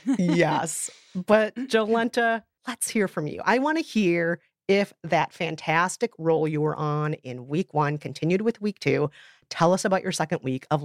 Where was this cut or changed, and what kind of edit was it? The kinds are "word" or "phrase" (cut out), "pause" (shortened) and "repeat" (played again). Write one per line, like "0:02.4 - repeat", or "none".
none